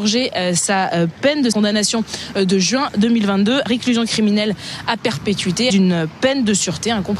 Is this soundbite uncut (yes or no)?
no